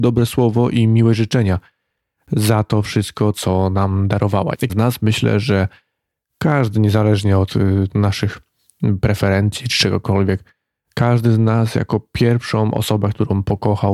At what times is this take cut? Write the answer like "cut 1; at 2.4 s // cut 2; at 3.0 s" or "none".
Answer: cut 1; at 4.7 s